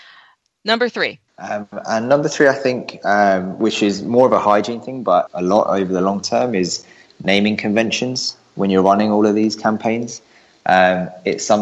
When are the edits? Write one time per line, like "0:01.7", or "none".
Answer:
0:01.3
0:05.3